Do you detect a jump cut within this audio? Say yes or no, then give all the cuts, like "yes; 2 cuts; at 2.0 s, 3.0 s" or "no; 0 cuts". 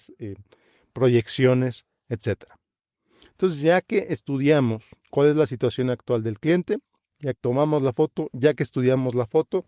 yes; 2 cuts; at 5.0 s, 7.3 s